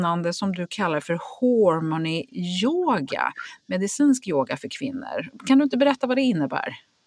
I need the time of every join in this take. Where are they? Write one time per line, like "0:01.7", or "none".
none